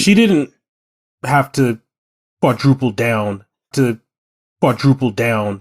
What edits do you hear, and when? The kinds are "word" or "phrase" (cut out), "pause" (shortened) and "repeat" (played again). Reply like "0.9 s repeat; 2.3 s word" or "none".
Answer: 3.7 s repeat